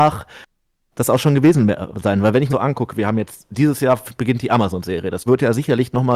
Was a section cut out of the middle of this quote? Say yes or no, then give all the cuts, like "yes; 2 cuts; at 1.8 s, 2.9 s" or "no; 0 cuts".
yes; 2 cuts; at 2.5 s, 5.3 s